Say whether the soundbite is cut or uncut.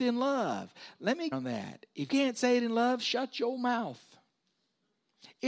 cut